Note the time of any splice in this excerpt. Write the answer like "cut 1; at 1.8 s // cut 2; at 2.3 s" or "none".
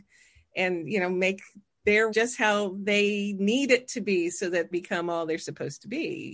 cut 1; at 2.1 s // cut 2; at 4.7 s